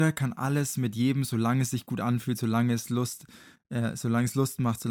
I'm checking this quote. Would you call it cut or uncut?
uncut